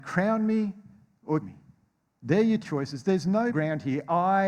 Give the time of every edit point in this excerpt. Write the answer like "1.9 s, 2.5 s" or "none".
1.4 s, 2.6 s, 3.5 s

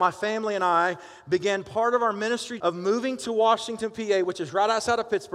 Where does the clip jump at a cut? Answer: 2.6 s

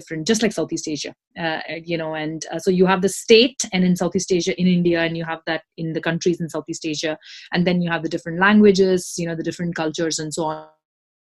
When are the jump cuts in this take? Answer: none

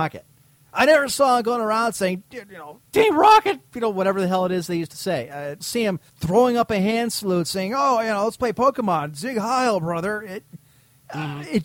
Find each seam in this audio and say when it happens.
2.8 s, 5.6 s, 6.1 s

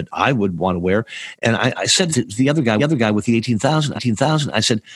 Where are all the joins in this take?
1.8 s, 2.1 s, 2.8 s, 4.0 s

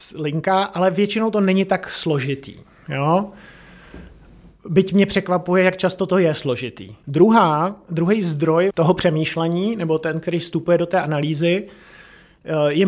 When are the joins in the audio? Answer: none

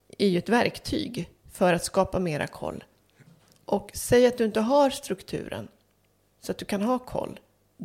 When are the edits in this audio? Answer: 1.4 s, 3.3 s

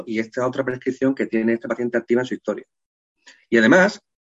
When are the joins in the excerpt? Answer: none

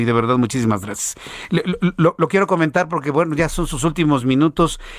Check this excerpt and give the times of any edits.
none

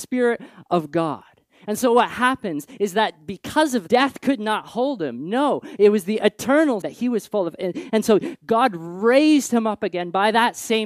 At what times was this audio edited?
3.9 s, 6.8 s

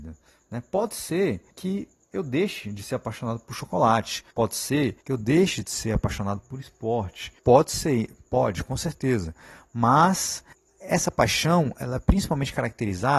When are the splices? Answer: 1.5 s, 4.3 s, 5.0 s, 7.4 s, 10.5 s

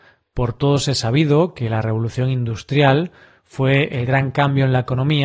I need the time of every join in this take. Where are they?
none

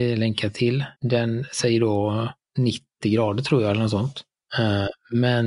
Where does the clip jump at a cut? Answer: 0.9 s

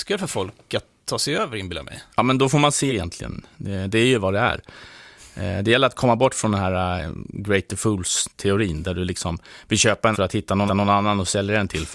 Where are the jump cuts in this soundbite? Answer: 2.1 s, 2.9 s, 10.1 s, 10.7 s

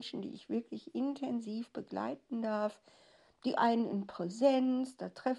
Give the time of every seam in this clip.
none

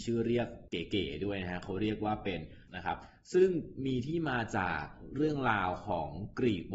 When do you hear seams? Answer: 2.7 s

